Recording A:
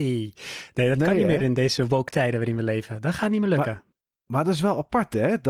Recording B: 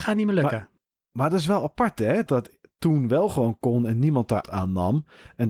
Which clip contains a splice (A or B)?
B